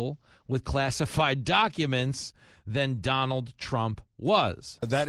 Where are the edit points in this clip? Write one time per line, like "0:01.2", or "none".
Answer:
none